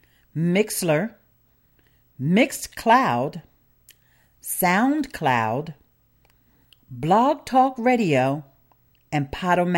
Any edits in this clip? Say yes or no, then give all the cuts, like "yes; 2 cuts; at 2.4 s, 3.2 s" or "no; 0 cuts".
no; 0 cuts